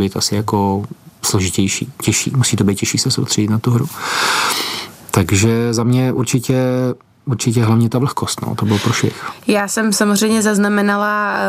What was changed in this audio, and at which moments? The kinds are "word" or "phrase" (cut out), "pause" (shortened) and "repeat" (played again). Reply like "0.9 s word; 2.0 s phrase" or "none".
none